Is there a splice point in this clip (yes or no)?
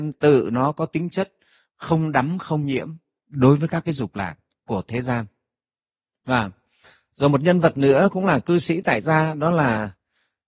no